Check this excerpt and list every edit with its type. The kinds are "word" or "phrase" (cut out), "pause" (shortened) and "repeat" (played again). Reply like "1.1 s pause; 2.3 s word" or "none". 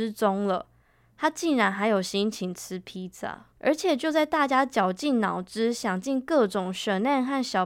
3.5 s pause